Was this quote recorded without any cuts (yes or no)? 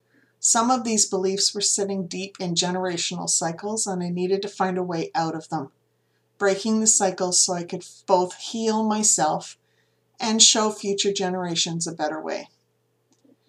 no